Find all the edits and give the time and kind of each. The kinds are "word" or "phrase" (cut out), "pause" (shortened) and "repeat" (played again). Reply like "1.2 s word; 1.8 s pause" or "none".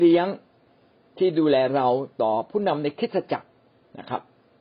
none